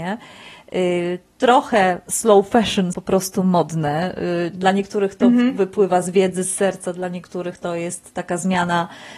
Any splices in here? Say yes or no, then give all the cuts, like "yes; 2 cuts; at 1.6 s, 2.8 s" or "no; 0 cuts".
yes; 1 cut; at 2.9 s